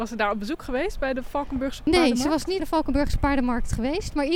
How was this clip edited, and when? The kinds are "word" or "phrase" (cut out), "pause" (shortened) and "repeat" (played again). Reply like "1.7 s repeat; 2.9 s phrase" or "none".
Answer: 2.6 s word

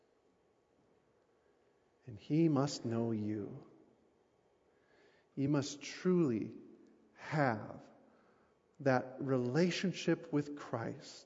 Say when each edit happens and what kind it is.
none

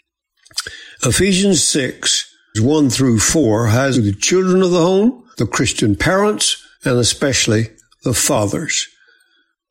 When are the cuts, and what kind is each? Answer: 2.5 s word; 3.9 s phrase; 5.3 s pause; 6.7 s pause

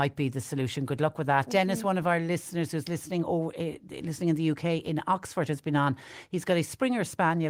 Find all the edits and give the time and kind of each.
none

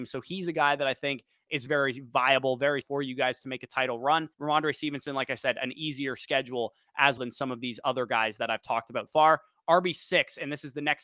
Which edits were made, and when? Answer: 1.7 s word; 2.8 s word; 4.3 s pause; 7.2 s word; 9.1 s word

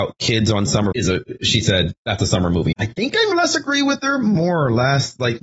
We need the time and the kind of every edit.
0.9 s word; 2.7 s word; 3.3 s word

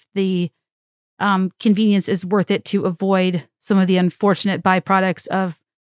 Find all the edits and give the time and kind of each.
none

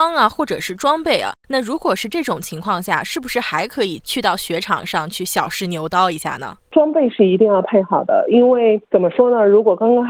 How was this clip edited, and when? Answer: 6.6 s pause

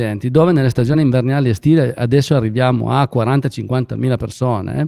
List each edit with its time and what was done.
none

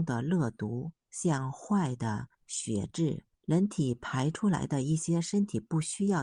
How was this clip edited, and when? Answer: 1.0 s pause; 2.3 s pause; 3.3 s pause

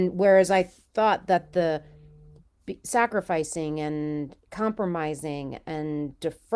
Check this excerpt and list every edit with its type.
none

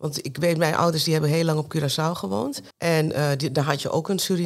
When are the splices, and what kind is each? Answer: 2.7 s pause

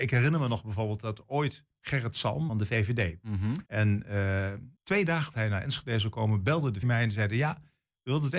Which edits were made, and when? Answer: 2.5 s phrase; 3.7 s pause; 4.8 s pause; 5.3 s word; 6.8 s word

